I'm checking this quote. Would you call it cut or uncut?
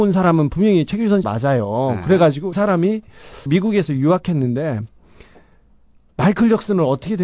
cut